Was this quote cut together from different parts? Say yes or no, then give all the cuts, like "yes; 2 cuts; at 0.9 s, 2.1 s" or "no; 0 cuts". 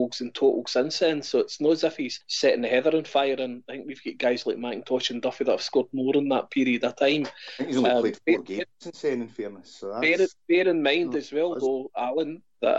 no; 0 cuts